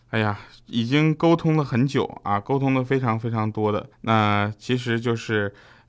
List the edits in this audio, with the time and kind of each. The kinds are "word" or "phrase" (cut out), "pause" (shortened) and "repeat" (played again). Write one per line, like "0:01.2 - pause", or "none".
0:03.9 - pause